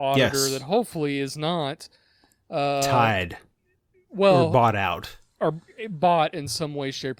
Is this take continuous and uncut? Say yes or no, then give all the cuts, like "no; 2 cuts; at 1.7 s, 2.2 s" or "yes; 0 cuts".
yes; 0 cuts